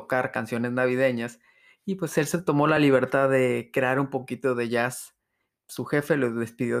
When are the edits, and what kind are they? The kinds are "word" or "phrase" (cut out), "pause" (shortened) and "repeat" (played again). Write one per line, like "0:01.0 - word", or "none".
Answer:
none